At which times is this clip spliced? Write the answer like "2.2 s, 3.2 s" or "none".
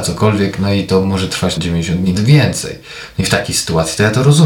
1.6 s, 2.2 s